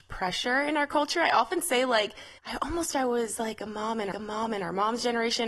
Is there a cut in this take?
yes; 3 cuts; at 2.4 s, 2.9 s, 4.1 s

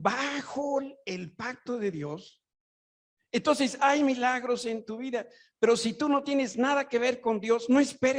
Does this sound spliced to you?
no; 0 cuts

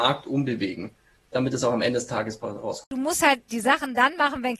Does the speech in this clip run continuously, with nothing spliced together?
yes; 0 cuts

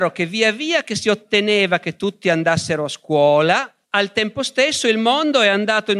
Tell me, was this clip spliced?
yes; 1 cut; at 3.8 s

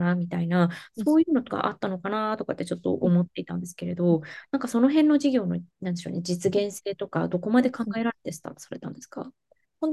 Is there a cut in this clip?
no; 0 cuts

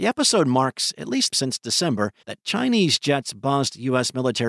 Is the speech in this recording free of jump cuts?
no; 2 cuts; at 1.3 s, 2.2 s

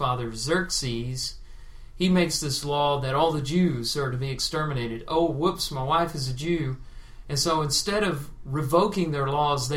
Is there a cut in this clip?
no; 0 cuts

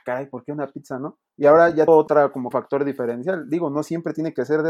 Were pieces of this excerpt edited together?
yes; 3 cuts; at 1.3 s, 1.9 s, 2.5 s

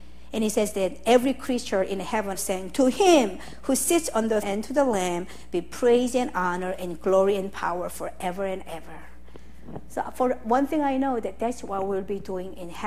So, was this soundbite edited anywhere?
yes; 2 cuts; at 2.3 s, 4.4 s

